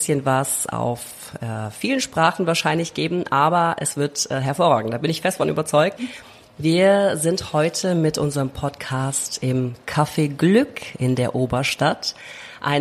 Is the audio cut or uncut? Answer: uncut